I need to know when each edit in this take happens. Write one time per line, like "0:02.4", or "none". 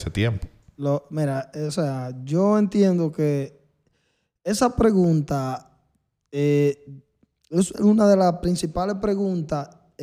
none